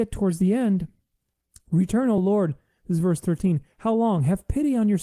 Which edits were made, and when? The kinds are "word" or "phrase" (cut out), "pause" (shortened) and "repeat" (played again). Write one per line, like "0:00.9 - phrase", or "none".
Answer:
none